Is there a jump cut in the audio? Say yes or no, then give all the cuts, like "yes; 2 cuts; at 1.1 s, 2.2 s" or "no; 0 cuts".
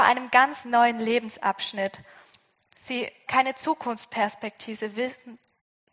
yes; 1 cut; at 3.3 s